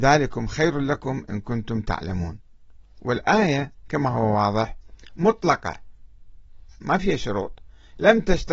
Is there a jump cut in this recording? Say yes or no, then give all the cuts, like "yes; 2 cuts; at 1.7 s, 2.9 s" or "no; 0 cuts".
no; 0 cuts